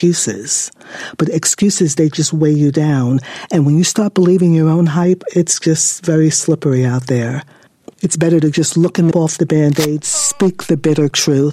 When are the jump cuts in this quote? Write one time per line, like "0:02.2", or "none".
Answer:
0:07.9
0:09.1